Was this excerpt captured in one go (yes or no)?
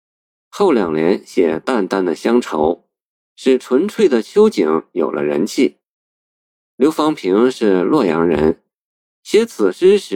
yes